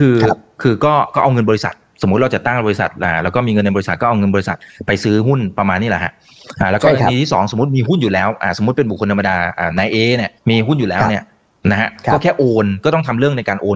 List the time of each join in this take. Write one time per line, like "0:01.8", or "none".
0:10.4